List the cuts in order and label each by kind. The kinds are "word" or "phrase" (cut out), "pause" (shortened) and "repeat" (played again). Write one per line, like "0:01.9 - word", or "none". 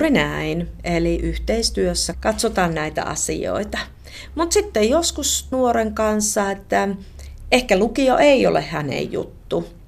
0:02.1 - word
0:05.5 - word